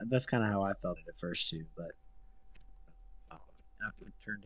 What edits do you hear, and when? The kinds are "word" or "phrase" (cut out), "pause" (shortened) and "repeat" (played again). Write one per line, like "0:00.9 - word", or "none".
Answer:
0:01.0 - word
0:03.3 - word